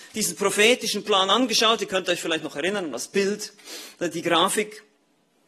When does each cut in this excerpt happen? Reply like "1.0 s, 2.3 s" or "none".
none